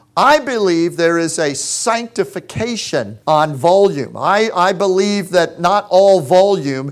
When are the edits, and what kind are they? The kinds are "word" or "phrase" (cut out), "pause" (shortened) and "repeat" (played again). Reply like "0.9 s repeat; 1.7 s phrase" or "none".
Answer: 3.2 s pause

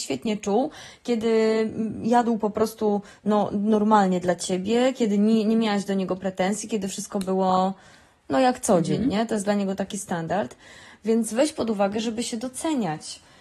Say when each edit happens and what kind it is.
none

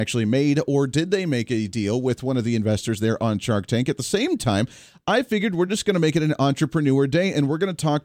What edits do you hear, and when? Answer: none

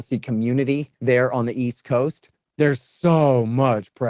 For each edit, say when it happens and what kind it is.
0.9 s pause; 2.3 s pause

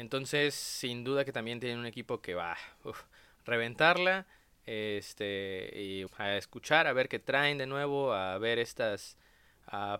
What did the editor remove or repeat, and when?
6.1 s word

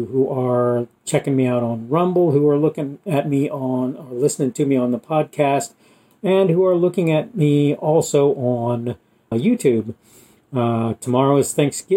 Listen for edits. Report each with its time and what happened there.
9.3 s word

